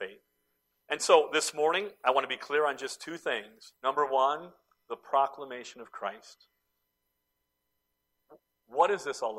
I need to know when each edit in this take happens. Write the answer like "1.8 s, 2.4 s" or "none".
3.8 s